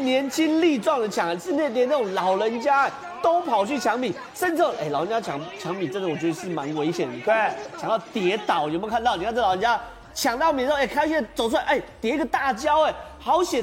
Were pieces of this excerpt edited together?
no; 0 cuts

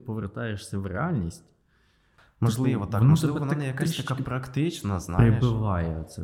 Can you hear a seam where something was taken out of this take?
no; 0 cuts

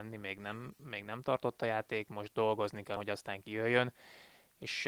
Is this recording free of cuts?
no; 1 cut; at 3.0 s

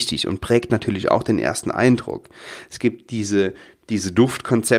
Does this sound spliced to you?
no; 0 cuts

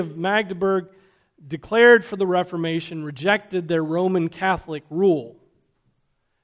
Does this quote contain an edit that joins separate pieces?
no; 0 cuts

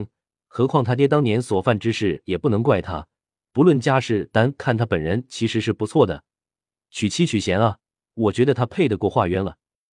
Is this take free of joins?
yes; 0 cuts

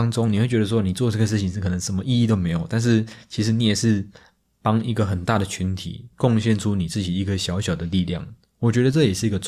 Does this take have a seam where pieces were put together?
no; 0 cuts

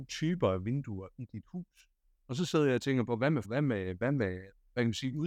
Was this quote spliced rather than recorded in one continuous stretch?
yes; 1 cut; at 3.4 s

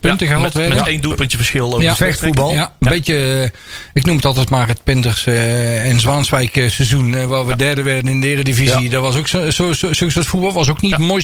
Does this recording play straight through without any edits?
yes; 0 cuts

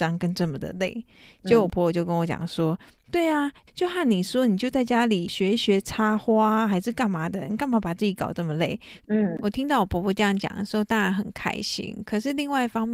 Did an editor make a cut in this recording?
no; 0 cuts

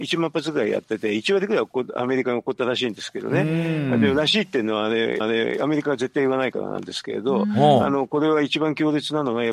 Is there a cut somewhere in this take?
yes; 1 cut; at 5.2 s

